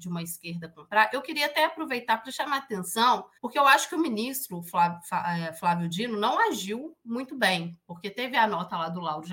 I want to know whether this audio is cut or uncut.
cut